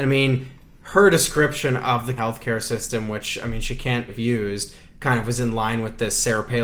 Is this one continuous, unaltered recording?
no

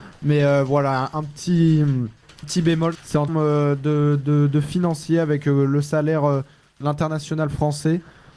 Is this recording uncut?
no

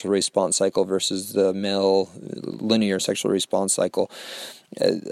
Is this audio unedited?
yes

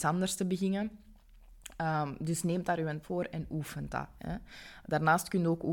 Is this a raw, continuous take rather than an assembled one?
no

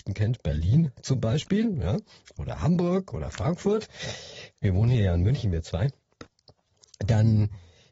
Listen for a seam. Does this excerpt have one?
no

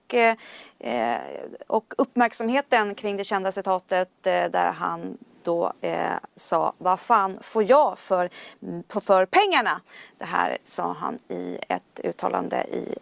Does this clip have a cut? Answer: no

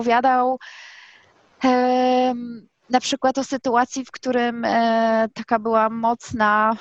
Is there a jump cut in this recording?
no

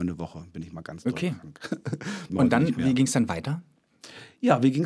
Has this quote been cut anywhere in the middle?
yes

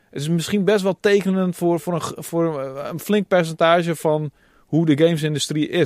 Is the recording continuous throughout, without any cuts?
yes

